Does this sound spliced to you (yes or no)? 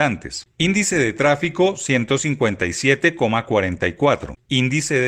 no